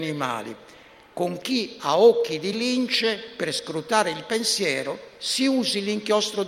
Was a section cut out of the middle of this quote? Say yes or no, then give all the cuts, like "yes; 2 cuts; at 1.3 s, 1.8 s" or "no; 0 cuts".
no; 0 cuts